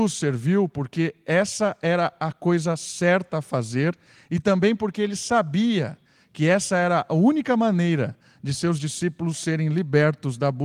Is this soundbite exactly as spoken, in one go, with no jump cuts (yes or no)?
yes